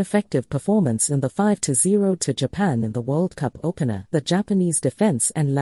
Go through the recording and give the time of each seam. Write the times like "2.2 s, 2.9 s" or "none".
2.2 s, 4.1 s